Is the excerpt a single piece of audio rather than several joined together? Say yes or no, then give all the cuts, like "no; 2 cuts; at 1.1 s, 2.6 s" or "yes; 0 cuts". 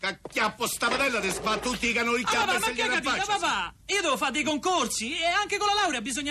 no; 1 cut; at 3.8 s